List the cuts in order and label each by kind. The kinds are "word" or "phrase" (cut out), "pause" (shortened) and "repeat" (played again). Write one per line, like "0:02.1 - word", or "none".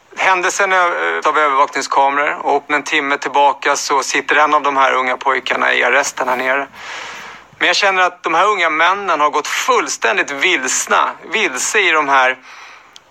0:01.2 - word
0:02.7 - word